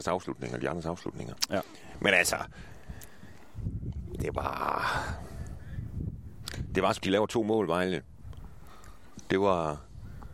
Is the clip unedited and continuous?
no; 2 cuts; at 4.2 s, 7.0 s

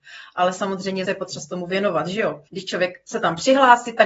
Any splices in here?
yes; 2 cuts; at 1.1 s, 2.5 s

